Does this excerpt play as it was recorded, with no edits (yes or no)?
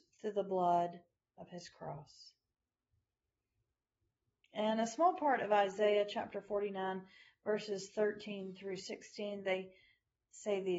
yes